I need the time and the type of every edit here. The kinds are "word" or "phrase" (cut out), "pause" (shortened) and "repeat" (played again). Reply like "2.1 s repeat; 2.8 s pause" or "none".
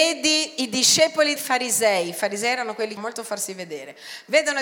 1.4 s word; 3.0 s phrase